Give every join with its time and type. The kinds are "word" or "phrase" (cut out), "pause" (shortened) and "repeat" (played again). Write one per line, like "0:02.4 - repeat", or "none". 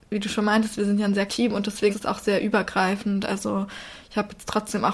0:01.3 - word
0:01.9 - word